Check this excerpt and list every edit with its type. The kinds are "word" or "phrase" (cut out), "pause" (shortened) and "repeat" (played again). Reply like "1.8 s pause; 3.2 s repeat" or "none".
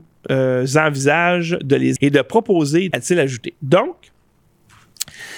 2.0 s word; 2.9 s phrase